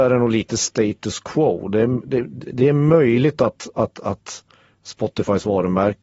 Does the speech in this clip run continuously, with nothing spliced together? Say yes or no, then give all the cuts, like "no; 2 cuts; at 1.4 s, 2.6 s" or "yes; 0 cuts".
yes; 0 cuts